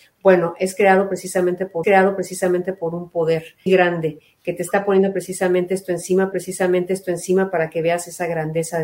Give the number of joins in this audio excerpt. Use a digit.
3